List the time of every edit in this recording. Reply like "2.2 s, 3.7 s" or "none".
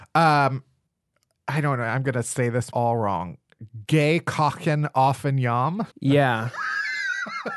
2.7 s, 5.9 s